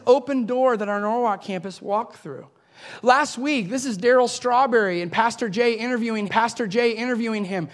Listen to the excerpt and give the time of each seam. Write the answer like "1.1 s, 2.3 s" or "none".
6.3 s